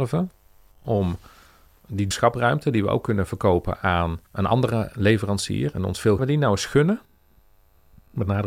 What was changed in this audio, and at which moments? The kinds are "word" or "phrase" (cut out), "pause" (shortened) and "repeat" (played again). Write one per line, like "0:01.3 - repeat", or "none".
0:02.1 - word
0:04.3 - pause
0:06.2 - phrase